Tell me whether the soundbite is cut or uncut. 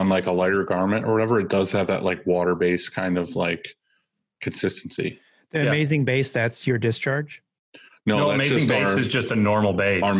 uncut